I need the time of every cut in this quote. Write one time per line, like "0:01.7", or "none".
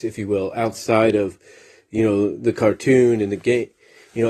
none

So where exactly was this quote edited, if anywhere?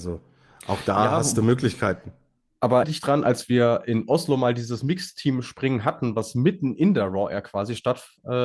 0:02.8

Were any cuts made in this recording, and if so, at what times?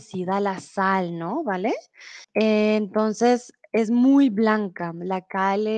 0:02.2

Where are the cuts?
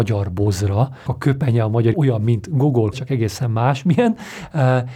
0:01.1
0:01.9
0:02.9

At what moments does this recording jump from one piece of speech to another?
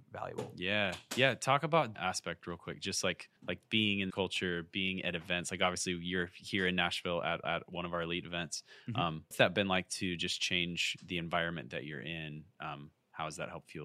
0:01.9
0:03.4
0:04.1
0:07.4
0:09.3

